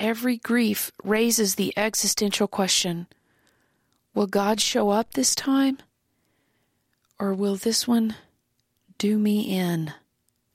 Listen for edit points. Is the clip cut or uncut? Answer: uncut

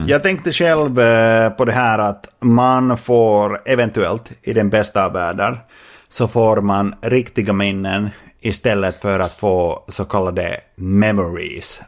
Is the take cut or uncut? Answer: uncut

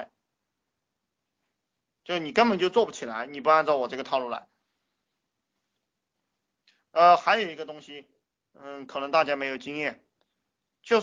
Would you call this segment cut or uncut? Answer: uncut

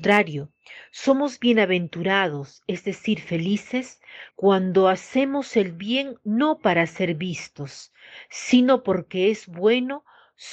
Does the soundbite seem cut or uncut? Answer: cut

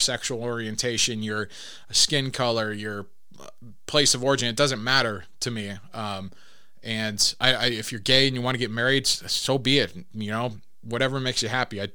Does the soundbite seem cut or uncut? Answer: uncut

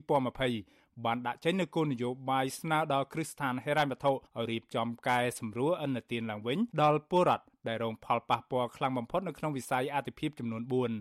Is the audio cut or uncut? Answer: cut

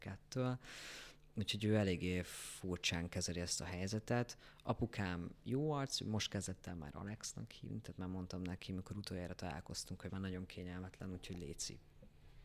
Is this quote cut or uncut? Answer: cut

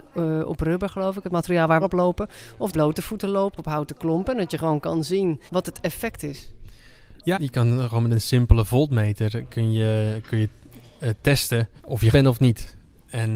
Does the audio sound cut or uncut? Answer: cut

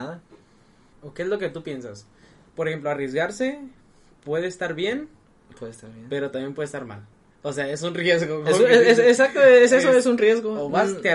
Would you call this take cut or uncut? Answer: uncut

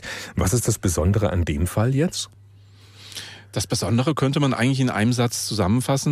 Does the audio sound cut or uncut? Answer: uncut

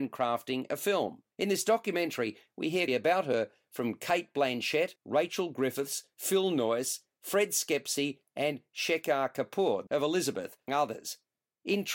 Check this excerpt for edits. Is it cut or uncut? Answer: cut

